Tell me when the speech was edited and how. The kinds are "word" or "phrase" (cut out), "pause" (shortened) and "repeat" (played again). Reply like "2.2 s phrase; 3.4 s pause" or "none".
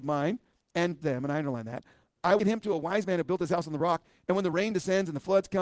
1.0 s word; 2.4 s word